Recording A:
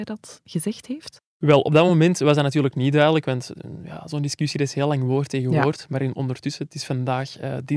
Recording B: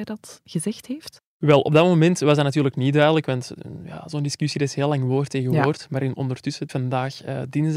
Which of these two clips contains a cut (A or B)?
B